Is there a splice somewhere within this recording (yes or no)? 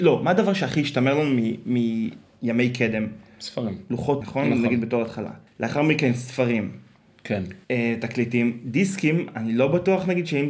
yes